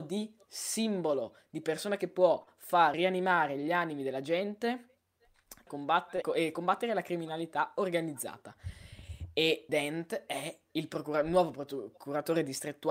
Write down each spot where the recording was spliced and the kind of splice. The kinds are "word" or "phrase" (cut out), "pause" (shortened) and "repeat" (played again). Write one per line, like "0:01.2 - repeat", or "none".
0:02.9 - word
0:05.7 - word
0:06.2 - word
0:09.7 - word